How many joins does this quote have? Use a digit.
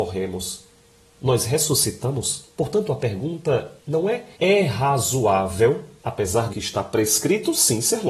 5